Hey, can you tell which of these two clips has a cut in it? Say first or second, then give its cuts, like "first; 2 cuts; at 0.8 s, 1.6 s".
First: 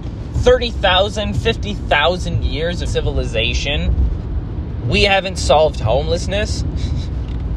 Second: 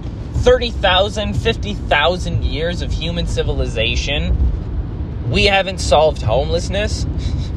first; 1 cut; at 2.9 s